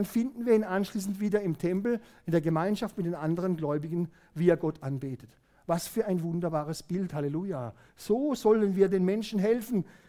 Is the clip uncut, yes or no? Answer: yes